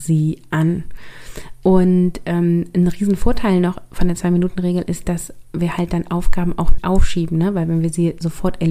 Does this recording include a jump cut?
yes; 1 cut; at 6.8 s

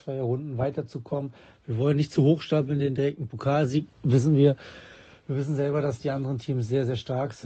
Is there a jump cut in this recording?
no; 0 cuts

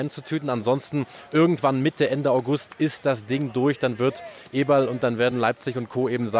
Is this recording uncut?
yes; 0 cuts

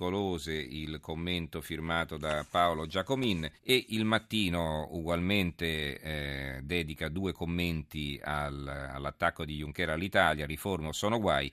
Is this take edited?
yes; 1 cut; at 3.6 s

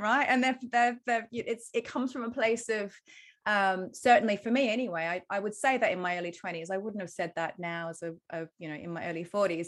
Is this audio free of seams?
yes; 0 cuts

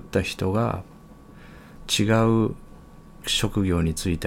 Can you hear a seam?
no; 0 cuts

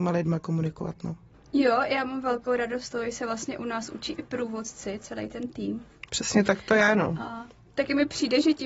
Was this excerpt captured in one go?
yes; 0 cuts

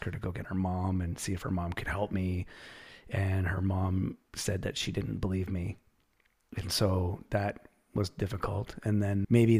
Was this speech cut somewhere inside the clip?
no; 0 cuts

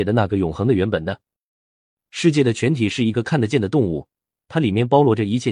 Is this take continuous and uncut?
yes; 0 cuts

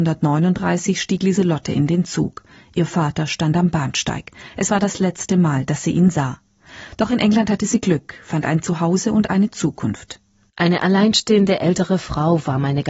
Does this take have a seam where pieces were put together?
no; 0 cuts

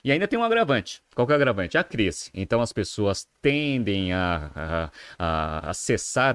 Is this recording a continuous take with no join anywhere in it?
yes; 0 cuts

